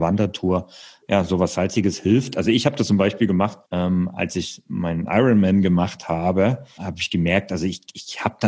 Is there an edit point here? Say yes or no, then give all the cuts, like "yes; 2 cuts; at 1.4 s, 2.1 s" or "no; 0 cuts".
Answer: yes; 2 cuts; at 3.6 s, 6.8 s